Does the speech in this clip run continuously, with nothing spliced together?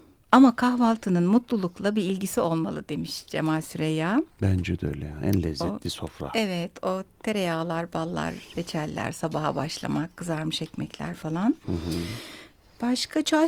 yes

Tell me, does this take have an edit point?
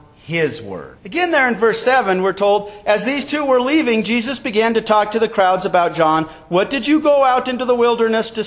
yes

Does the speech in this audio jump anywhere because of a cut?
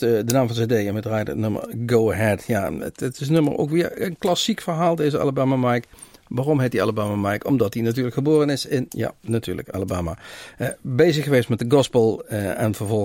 no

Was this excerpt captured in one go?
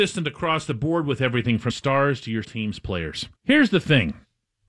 no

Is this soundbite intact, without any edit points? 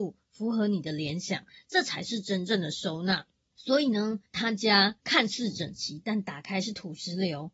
no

